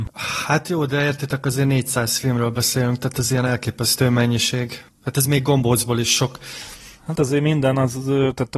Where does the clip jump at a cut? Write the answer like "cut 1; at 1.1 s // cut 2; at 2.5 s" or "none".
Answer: cut 1; at 4.9 s // cut 2; at 7.2 s